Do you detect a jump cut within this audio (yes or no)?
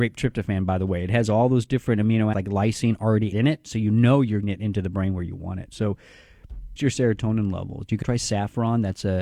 yes